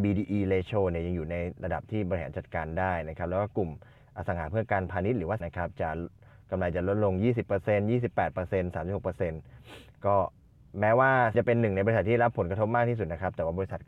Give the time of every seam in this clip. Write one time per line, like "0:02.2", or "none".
0:05.4
0:11.3